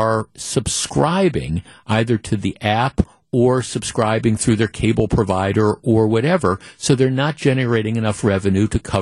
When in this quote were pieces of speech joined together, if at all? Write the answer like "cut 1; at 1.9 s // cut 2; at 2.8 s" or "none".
none